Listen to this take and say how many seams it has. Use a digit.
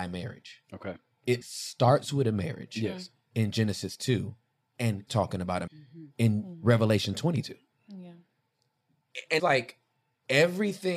4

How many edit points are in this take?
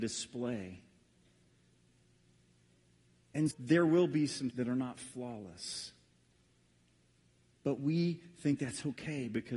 2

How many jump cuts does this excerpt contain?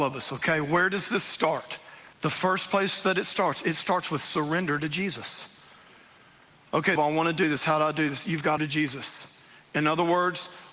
3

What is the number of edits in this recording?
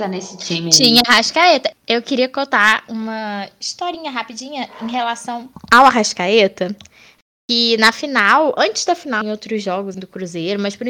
2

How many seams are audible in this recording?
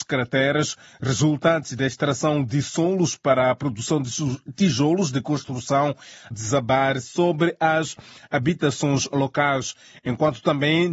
1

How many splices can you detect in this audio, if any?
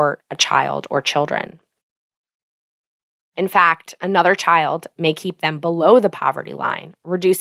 0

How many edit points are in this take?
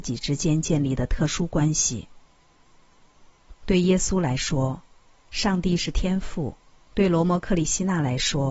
1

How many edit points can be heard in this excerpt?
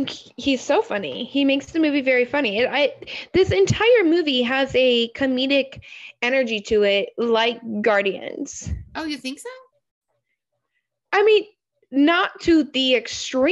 0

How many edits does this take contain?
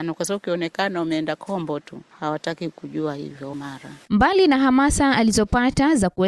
1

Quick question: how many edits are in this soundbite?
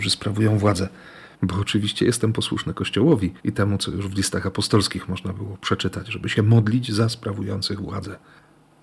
2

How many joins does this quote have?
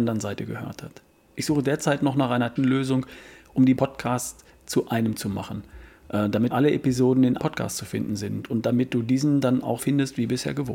6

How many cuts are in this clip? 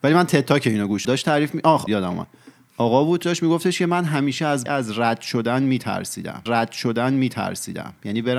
5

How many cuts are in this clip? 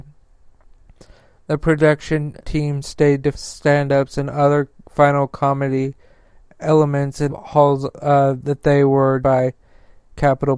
4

